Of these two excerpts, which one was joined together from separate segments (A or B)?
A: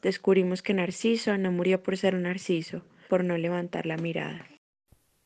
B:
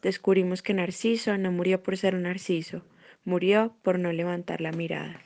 A